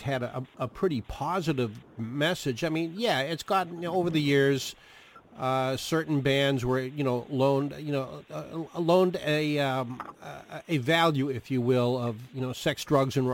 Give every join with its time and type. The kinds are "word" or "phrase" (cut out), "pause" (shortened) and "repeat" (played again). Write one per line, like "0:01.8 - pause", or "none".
none